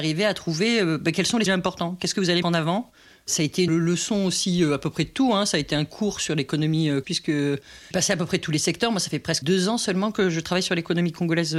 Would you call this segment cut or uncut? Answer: cut